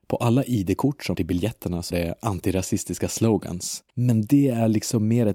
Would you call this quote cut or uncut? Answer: cut